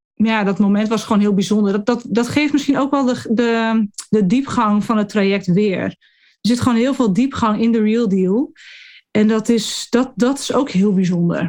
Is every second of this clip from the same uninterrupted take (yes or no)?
yes